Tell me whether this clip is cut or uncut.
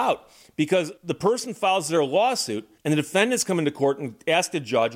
cut